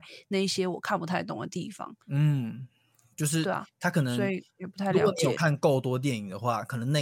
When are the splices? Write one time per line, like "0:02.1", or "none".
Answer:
0:02.0